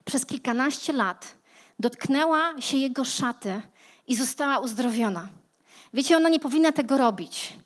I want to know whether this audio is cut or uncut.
uncut